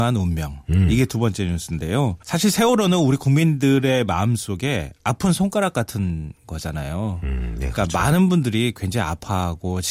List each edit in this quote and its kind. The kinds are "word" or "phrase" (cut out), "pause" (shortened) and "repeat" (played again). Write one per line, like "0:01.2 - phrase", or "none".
0:02.2 - pause